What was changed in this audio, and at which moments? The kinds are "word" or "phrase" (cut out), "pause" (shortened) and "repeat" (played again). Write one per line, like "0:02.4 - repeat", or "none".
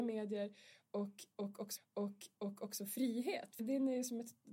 0:01.8 - repeat
0:03.6 - word